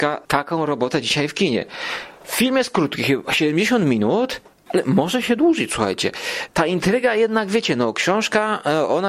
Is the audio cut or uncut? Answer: uncut